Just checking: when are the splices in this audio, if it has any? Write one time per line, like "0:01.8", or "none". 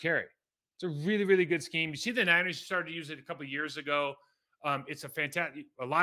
none